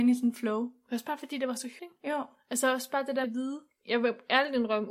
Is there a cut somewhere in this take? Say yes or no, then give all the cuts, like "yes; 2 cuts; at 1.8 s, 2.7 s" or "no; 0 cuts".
yes; 2 cuts; at 1.8 s, 3.2 s